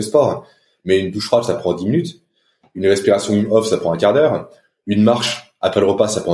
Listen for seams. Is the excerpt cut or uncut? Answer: uncut